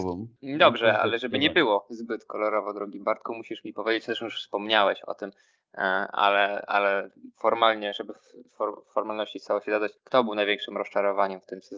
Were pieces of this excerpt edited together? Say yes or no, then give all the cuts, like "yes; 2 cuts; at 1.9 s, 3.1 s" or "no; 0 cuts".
yes; 1 cut; at 10.0 s